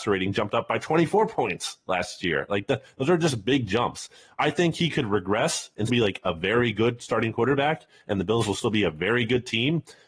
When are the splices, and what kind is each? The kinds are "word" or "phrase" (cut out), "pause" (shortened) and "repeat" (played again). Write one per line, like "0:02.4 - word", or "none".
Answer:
0:05.9 - word

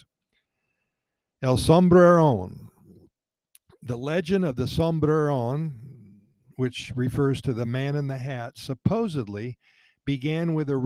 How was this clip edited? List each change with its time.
none

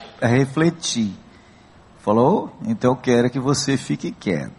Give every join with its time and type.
none

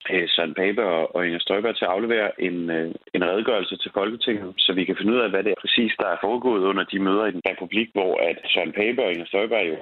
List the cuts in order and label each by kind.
0:05.5 - word
0:07.4 - word

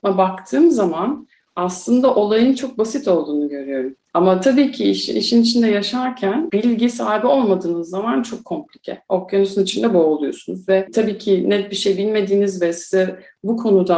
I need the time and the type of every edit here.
none

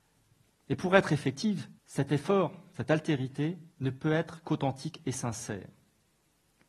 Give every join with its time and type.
0:01.8 - pause
0:03.7 - pause

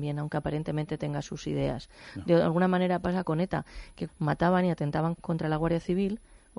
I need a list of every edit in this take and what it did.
0:03.2 - word
0:04.1 - word
0:05.2 - word

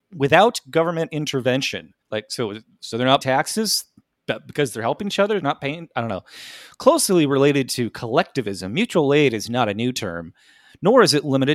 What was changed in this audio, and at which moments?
0:02.0 - pause
0:02.8 - word
0:03.2 - word

